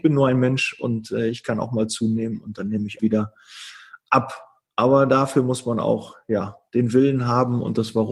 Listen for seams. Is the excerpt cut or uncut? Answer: cut